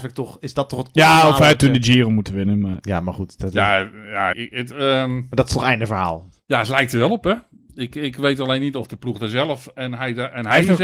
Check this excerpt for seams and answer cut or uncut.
cut